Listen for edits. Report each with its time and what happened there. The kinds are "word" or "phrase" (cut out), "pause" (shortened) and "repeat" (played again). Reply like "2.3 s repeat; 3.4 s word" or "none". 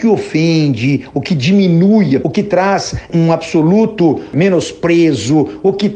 2.2 s word